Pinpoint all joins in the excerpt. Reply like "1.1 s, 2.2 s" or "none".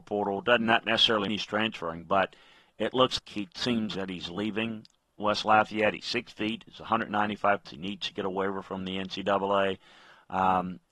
1.3 s, 3.2 s, 3.9 s, 7.6 s